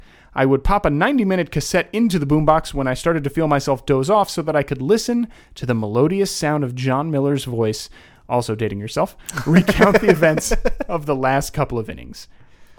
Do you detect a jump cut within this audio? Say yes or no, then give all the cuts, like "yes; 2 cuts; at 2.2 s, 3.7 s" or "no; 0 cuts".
no; 0 cuts